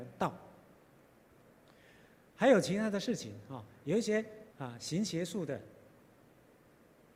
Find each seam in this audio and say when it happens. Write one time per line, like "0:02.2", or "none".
0:04.5